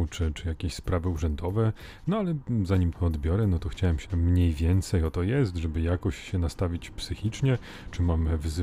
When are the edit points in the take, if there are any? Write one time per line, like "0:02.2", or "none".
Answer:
0:02.9
0:04.1
0:05.1